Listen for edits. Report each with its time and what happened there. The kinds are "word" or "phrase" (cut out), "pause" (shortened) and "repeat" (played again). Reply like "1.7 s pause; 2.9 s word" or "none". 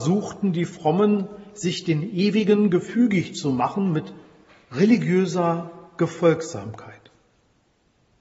none